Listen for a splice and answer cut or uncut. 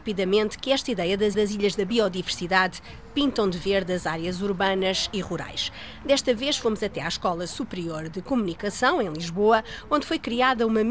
cut